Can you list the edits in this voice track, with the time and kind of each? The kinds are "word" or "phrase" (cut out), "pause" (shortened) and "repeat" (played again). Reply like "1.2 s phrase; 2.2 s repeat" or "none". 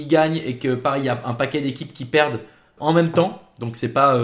2.8 s word